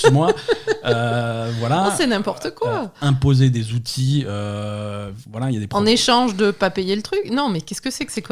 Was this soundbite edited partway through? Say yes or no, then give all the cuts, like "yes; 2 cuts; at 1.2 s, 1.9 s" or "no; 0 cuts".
no; 0 cuts